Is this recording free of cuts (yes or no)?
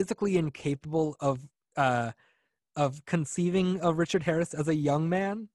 yes